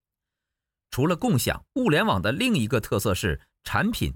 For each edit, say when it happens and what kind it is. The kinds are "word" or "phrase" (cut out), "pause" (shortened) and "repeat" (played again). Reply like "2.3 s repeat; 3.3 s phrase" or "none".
1.7 s pause